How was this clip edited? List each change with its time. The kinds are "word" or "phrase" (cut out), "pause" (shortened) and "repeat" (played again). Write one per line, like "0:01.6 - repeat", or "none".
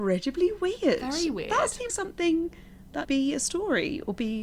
0:01.9 - word
0:03.0 - word